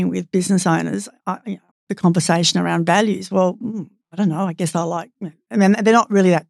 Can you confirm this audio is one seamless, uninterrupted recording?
no; 1 cut; at 1.7 s

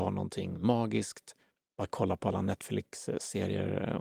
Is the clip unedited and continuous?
yes; 0 cuts

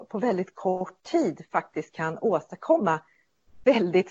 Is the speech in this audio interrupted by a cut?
no; 0 cuts

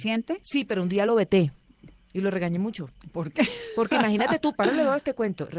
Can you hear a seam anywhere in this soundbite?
no; 0 cuts

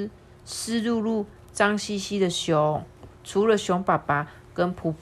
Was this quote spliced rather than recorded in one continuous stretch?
yes; 1 cut; at 3.1 s

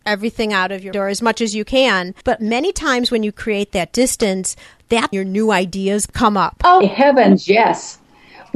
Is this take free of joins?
no; 4 cuts; at 0.9 s, 2.2 s, 5.1 s, 6.8 s

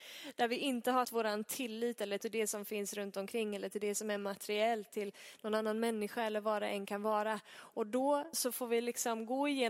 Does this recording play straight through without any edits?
no; 4 cuts; at 1.0 s, 2.2 s, 4.9 s, 8.3 s

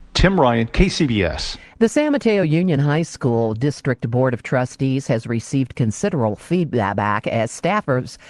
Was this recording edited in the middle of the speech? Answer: no; 0 cuts

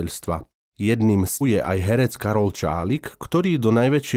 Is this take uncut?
no; 1 cut; at 1.4 s

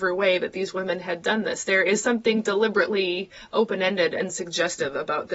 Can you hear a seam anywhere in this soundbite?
no; 0 cuts

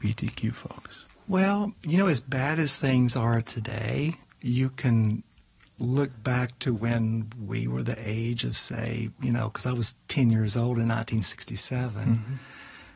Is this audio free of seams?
yes; 0 cuts

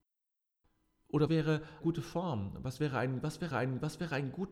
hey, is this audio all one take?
no; 3 cuts; at 1.3 s, 1.8 s, 3.5 s

